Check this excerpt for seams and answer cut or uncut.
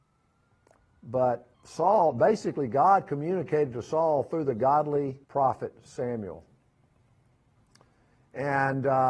cut